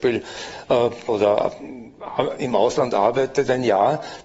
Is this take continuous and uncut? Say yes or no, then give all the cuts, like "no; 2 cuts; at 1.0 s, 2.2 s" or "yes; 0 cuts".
no; 1 cut; at 1.1 s